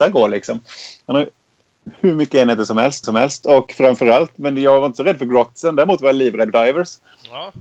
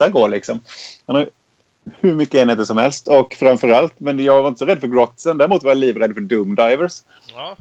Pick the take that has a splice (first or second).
first